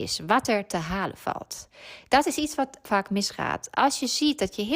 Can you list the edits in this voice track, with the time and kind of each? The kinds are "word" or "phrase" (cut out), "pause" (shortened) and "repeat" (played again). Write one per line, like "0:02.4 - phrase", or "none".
0:02.8 - word